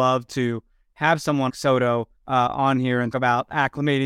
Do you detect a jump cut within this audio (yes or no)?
yes